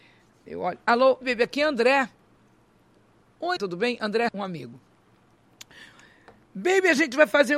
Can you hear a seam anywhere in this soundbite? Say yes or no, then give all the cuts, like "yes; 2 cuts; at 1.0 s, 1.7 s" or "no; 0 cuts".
yes; 3 cuts; at 1.2 s, 3.6 s, 4.3 s